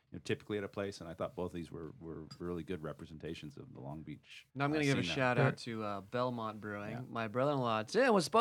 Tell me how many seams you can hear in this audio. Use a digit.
1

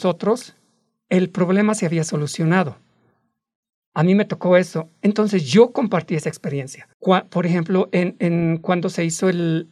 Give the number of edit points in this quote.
1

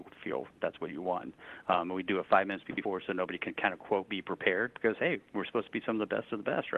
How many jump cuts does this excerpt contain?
1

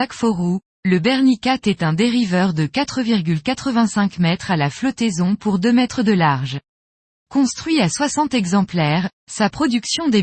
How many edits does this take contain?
0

